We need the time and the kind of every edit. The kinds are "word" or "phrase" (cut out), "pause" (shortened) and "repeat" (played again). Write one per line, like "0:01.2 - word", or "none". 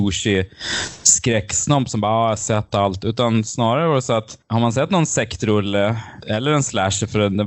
none